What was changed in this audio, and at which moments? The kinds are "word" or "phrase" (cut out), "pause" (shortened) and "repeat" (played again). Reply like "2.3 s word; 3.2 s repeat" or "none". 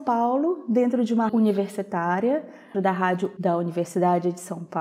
1.3 s word; 2.7 s word; 3.4 s word